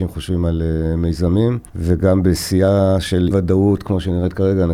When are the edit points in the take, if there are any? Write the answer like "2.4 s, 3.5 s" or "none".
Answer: 1.7 s, 3.3 s